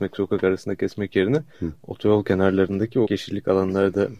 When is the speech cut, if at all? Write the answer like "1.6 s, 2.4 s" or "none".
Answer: 1.5 s, 3.1 s